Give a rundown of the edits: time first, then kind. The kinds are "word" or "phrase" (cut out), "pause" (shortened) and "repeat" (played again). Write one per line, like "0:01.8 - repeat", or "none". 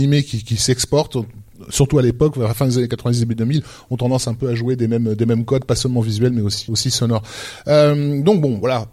0:06.7 - word